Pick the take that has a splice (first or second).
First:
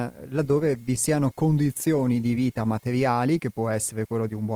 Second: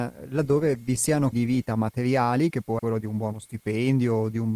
second